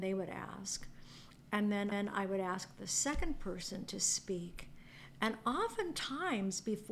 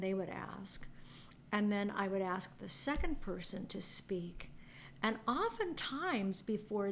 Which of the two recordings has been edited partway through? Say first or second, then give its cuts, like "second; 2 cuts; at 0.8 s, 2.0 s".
first; 1 cut; at 1.9 s